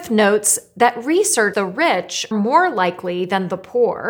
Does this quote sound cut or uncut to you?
cut